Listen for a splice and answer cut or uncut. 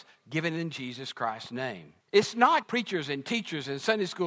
cut